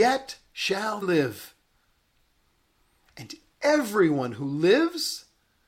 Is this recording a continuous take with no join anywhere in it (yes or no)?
no